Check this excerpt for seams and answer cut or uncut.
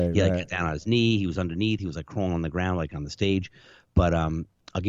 uncut